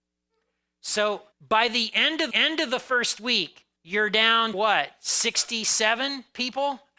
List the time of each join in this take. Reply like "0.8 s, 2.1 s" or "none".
1.3 s, 2.3 s, 3.8 s, 4.5 s

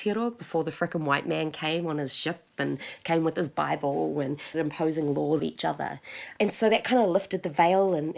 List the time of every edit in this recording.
4.5 s, 5.4 s

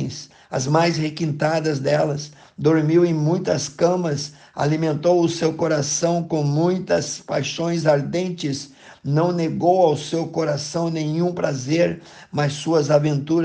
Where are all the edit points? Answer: none

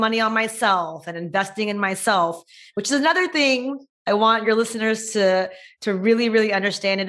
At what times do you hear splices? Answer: none

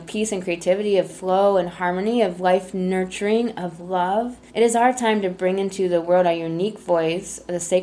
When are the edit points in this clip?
4.5 s

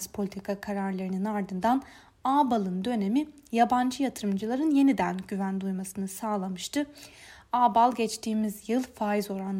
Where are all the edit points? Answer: none

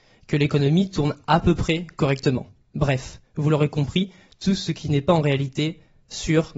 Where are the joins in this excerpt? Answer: none

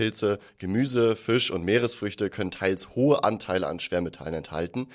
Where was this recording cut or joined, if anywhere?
none

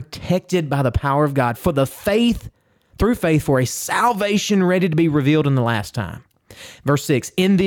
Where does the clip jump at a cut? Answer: none

